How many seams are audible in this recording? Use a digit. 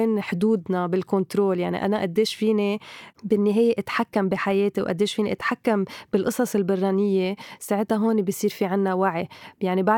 0